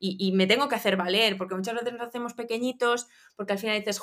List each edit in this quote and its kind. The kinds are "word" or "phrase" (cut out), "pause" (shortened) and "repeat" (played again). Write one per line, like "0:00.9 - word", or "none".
none